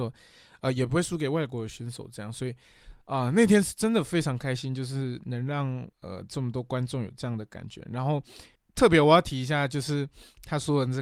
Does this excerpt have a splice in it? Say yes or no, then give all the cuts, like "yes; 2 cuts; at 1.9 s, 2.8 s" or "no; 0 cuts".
yes; 3 cuts; at 3.0 s, 5.9 s, 8.6 s